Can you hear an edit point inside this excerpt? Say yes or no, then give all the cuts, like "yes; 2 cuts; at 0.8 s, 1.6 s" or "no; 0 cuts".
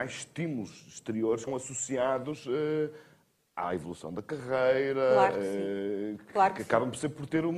yes; 1 cut; at 1.5 s